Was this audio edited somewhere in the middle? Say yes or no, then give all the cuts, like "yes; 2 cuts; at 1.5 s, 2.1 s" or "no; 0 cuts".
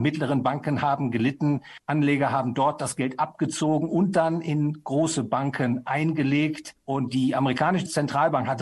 no; 0 cuts